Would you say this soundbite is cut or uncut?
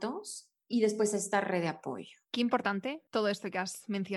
cut